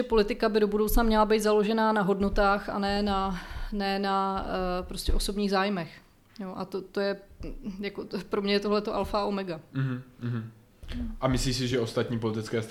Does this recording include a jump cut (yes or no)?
no